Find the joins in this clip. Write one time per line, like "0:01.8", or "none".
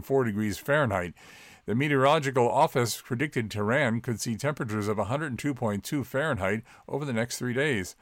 none